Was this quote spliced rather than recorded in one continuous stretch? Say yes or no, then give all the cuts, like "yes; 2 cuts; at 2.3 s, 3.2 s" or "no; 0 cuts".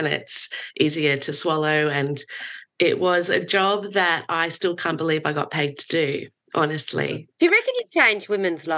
yes; 1 cut; at 7.3 s